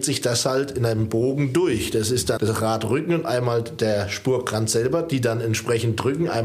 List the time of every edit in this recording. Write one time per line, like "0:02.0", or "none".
0:02.4